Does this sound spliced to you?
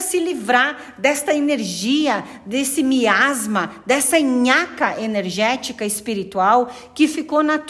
no; 0 cuts

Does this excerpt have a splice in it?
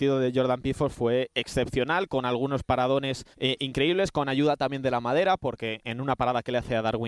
yes; 1 cut; at 3.3 s

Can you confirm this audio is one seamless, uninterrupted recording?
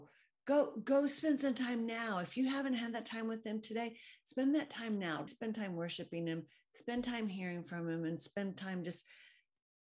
no; 1 cut; at 5.3 s

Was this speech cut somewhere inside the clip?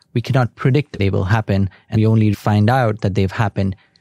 yes; 3 cuts; at 1.0 s, 1.9 s, 2.3 s

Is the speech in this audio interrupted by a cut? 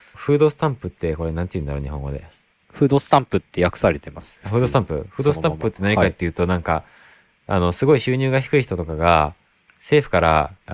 no; 0 cuts

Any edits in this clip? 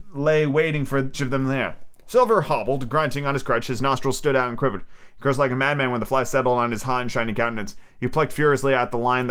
yes; 1 cut; at 1.1 s

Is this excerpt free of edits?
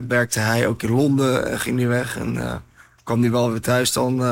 yes; 0 cuts

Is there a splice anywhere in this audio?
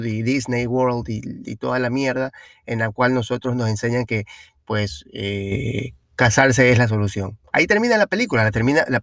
no; 0 cuts

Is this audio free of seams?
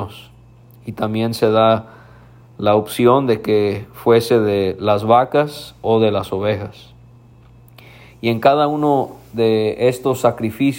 yes; 0 cuts

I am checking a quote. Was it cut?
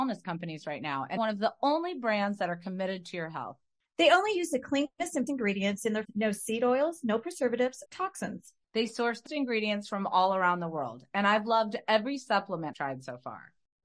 yes; 6 cuts; at 1.2 s, 5.3 s, 6.0 s, 7.9 s, 9.3 s, 12.7 s

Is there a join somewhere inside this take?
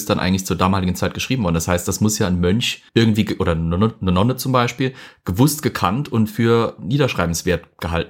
yes; 1 cut; at 2.9 s

